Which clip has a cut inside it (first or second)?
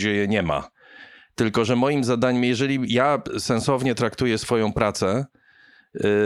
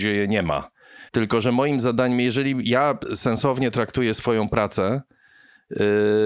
second